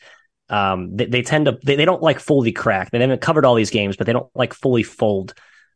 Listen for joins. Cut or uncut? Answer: uncut